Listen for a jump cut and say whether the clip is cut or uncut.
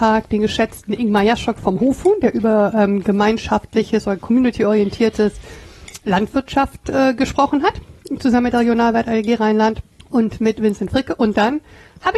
uncut